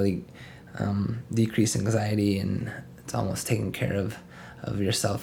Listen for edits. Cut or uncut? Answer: uncut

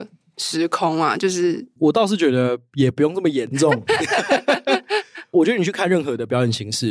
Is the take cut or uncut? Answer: cut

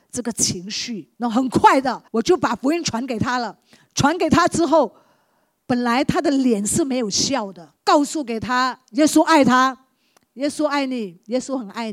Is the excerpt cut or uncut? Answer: cut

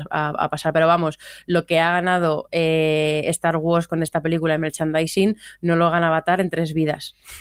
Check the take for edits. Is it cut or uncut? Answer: uncut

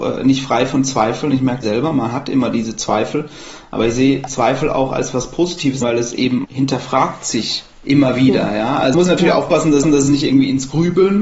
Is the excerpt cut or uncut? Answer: cut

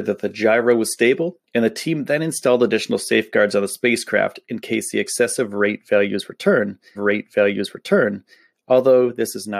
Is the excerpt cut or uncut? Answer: cut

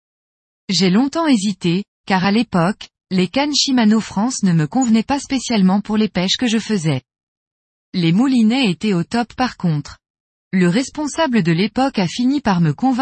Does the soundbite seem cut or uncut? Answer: uncut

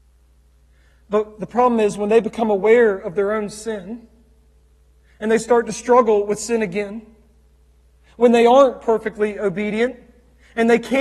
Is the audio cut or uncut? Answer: uncut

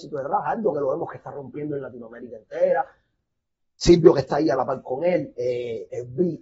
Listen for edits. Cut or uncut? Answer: uncut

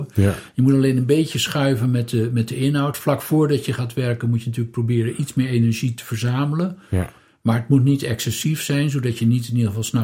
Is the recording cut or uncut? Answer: uncut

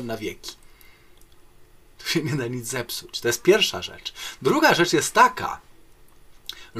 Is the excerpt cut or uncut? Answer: uncut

